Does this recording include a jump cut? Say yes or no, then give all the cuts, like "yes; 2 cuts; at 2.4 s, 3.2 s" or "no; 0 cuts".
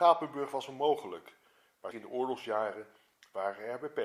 yes; 1 cut; at 1.9 s